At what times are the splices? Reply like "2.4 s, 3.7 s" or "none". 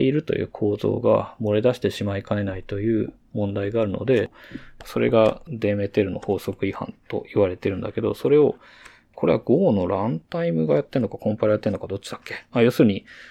none